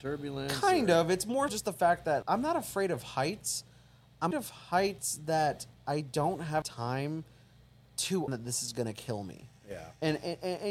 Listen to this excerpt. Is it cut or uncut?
cut